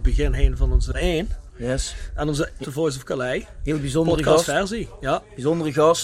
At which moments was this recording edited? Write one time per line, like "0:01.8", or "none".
0:00.9
0:02.6